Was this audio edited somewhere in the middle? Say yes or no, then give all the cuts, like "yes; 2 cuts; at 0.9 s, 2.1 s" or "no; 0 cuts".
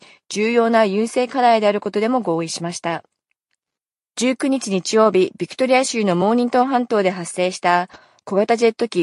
no; 0 cuts